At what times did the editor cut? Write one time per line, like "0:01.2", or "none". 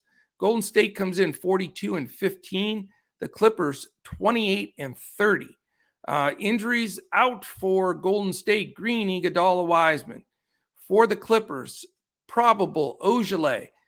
none